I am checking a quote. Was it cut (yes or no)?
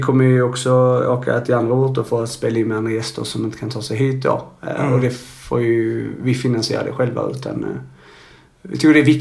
no